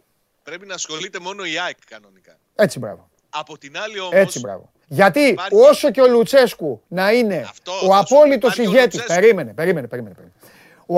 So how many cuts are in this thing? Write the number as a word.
two